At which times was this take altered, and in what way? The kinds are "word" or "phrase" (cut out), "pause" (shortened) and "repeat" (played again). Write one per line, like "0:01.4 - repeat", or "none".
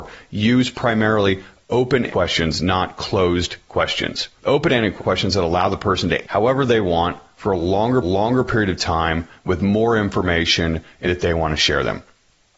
0:02.1 - word
0:04.4 - pause
0:05.0 - phrase
0:06.2 - word
0:08.0 - repeat
0:11.0 - phrase